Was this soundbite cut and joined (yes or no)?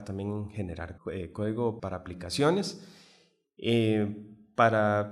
yes